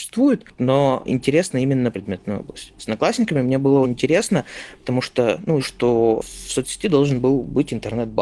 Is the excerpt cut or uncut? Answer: cut